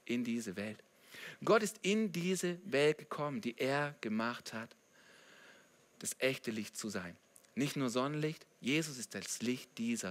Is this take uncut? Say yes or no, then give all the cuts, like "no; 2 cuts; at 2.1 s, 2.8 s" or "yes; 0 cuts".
no; 1 cut; at 6.0 s